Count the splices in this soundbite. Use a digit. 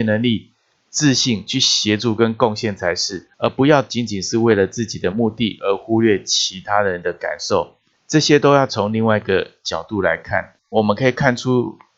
2